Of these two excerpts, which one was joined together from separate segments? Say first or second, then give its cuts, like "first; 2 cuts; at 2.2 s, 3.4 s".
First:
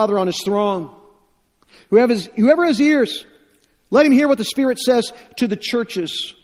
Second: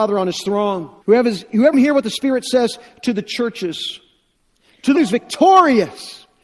second; 4 cuts; at 1.0 s, 1.7 s, 4.4 s, 4.9 s